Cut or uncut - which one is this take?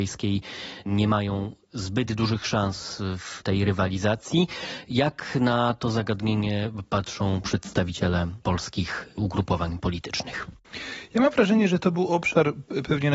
uncut